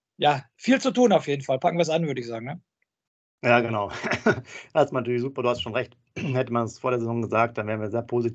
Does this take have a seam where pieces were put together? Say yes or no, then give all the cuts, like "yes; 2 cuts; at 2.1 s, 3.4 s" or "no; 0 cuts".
no; 0 cuts